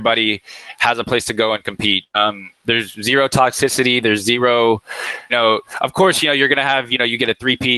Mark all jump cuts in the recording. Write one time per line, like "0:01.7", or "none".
0:05.3